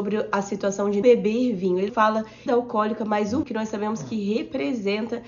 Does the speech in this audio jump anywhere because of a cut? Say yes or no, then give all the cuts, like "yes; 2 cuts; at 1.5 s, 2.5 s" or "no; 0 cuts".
yes; 4 cuts; at 1.0 s, 1.9 s, 2.5 s, 3.4 s